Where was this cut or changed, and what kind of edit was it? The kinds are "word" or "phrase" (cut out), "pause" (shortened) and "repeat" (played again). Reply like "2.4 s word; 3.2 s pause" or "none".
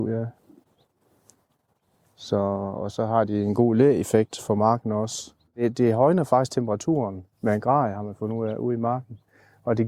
none